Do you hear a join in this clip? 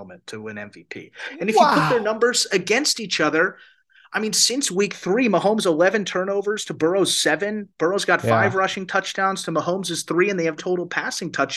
yes; 1 cut; at 10.6 s

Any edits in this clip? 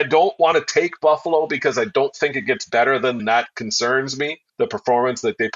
yes; 2 cuts; at 3.2 s, 4.5 s

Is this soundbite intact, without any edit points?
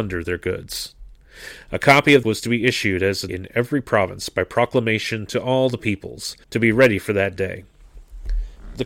no; 3 cuts; at 2.2 s, 3.3 s, 6.4 s

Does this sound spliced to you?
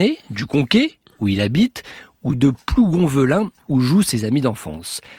no; 0 cuts

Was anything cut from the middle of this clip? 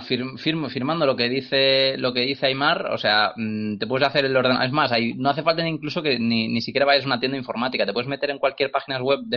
no; 0 cuts

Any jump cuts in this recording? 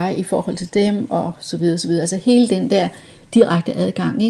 no; 0 cuts

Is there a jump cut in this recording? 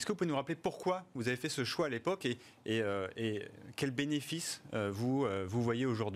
no; 0 cuts

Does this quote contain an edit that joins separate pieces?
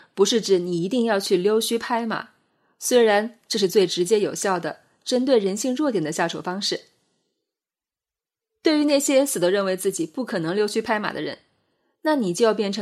no; 0 cuts

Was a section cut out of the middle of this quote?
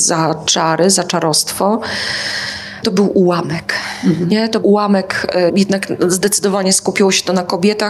yes; 3 cuts; at 2.8 s, 4.6 s, 5.5 s

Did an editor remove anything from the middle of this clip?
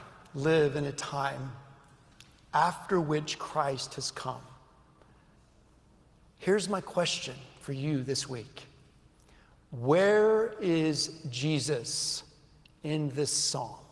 no; 0 cuts

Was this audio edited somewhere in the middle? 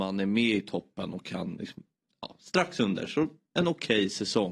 no; 0 cuts

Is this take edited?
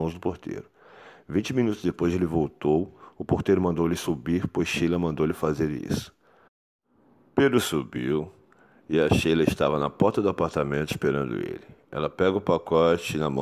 no; 0 cuts

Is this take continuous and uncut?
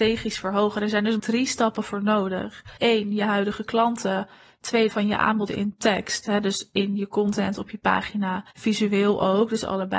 no; 5 cuts; at 1.2 s, 2.8 s, 4.9 s, 5.5 s, 8.5 s

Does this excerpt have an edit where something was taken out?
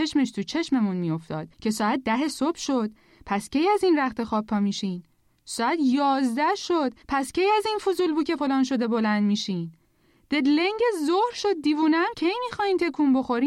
yes; 4 cuts; at 1.5 s, 7.0 s, 8.4 s, 12.1 s

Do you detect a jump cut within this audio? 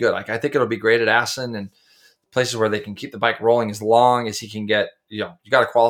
no; 0 cuts

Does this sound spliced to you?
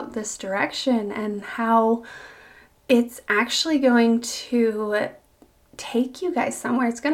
no; 0 cuts

